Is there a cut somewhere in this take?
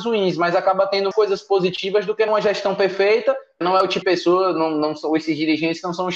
yes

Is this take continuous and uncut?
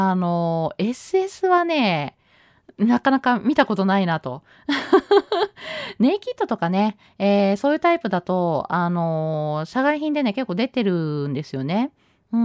yes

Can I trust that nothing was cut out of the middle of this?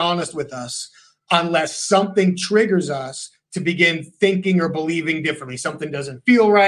yes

